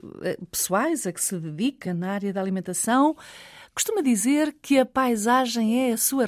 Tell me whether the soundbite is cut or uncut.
uncut